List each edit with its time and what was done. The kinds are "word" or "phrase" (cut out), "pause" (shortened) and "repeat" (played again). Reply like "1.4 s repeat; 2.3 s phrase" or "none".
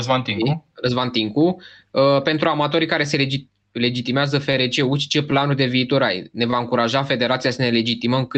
none

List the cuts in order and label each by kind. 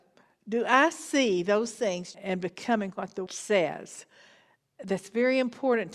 2.1 s word; 3.3 s word

